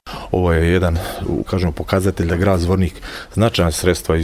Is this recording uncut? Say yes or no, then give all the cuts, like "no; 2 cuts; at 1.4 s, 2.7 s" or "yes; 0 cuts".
no; 1 cut; at 1.5 s